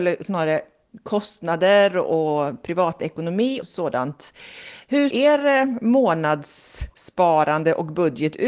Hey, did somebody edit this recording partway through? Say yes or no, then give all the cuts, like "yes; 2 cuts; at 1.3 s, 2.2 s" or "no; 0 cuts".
yes; 2 cuts; at 3.6 s, 5.1 s